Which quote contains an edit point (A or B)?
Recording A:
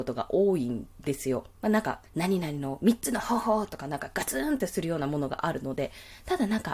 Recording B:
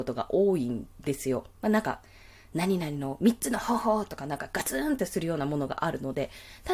A